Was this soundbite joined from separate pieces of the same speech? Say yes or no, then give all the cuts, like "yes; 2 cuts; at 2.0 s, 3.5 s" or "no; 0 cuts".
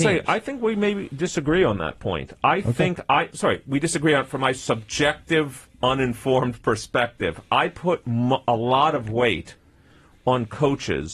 yes; 1 cut; at 3.3 s